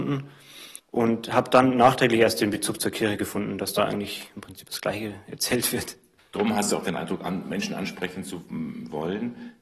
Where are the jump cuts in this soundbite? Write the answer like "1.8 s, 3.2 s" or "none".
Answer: none